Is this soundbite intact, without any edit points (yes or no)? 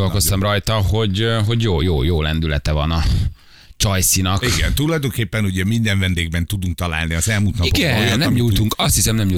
yes